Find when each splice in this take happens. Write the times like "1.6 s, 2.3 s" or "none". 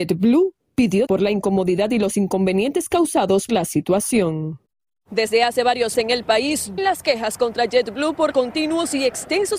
1.1 s, 3.5 s, 5.9 s, 6.8 s, 8.3 s